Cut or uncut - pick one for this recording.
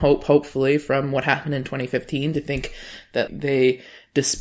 cut